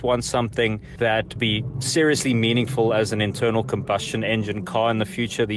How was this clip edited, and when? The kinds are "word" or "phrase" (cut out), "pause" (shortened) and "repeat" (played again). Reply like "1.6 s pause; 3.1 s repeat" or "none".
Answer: 1.4 s word